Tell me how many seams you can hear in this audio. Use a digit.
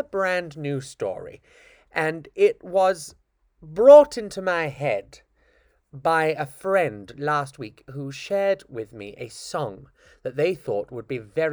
0